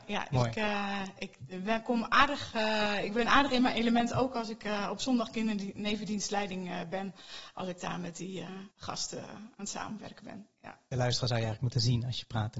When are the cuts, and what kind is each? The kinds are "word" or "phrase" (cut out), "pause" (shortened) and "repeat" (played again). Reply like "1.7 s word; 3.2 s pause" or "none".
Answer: 8.7 s pause